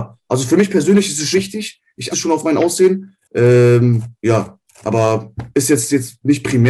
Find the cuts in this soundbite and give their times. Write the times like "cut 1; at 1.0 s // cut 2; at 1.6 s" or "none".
cut 1; at 1.3 s // cut 2; at 2.1 s // cut 3; at 3.2 s // cut 4; at 5.5 s